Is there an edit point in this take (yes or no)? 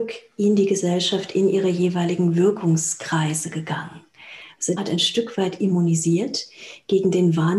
yes